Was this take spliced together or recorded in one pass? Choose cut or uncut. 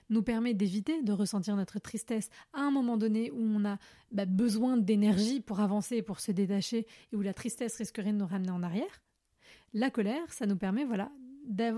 uncut